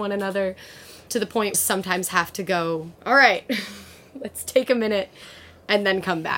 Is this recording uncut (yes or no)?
no